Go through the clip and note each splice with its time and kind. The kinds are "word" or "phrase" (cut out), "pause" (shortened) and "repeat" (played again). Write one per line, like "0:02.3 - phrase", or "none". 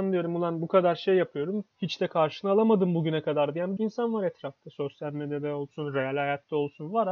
0:01.7 - pause
0:03.8 - word